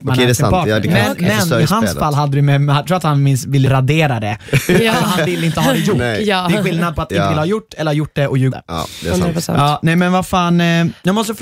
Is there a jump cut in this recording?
yes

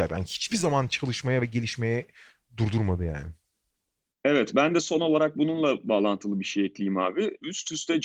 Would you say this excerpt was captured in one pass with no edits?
yes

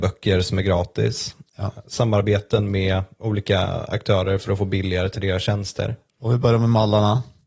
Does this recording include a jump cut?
no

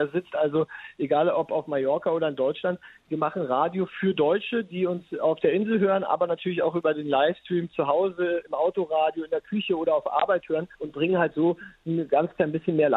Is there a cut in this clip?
yes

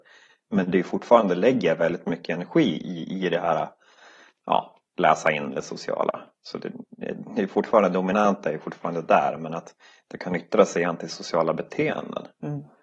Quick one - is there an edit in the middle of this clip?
no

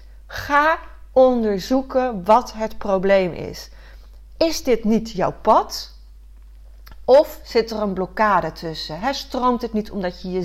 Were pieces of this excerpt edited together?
no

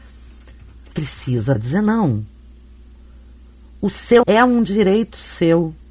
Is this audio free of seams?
no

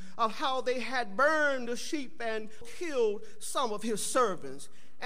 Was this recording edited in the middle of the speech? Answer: yes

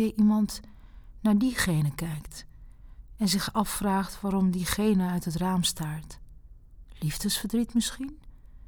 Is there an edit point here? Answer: no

